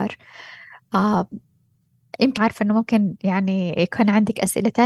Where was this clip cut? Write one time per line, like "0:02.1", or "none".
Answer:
0:02.4